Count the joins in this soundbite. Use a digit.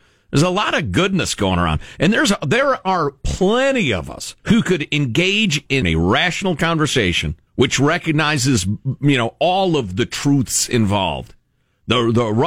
3